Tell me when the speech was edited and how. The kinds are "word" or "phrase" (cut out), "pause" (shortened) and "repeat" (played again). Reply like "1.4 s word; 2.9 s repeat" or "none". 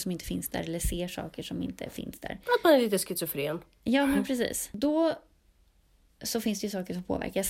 none